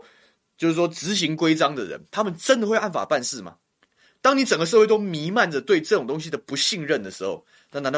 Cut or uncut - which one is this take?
uncut